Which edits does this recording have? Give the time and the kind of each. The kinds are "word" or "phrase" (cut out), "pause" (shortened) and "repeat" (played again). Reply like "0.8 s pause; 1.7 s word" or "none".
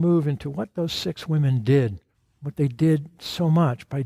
2.1 s pause